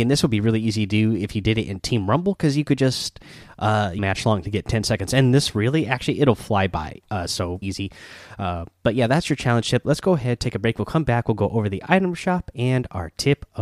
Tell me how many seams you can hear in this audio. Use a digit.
2